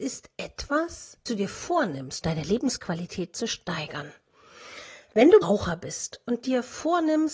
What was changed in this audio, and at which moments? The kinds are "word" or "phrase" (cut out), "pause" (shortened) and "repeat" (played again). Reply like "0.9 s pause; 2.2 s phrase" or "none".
1.3 s word; 2.2 s word; 5.4 s word